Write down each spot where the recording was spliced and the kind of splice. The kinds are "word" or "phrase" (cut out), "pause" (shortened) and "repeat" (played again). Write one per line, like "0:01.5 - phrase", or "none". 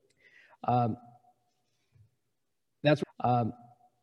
0:03.0 - repeat